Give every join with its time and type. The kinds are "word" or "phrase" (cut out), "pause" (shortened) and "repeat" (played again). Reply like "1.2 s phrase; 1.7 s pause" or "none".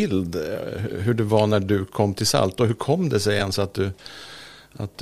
none